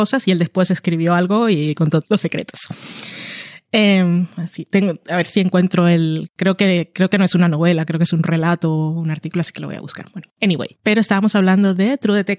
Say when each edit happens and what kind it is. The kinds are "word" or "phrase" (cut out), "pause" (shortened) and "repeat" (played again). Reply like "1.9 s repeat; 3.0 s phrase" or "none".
2.0 s word